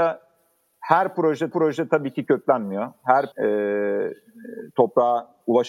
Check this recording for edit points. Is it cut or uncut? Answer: cut